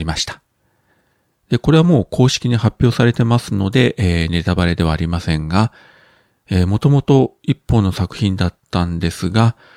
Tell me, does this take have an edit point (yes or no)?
no